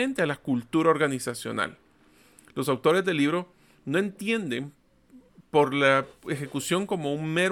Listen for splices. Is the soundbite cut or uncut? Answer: uncut